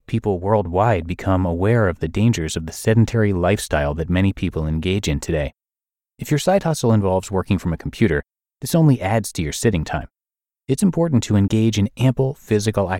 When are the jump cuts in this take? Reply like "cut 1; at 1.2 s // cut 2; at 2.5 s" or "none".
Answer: none